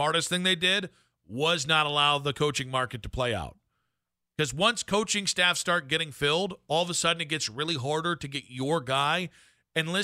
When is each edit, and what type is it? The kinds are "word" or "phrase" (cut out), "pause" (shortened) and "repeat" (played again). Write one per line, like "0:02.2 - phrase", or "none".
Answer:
none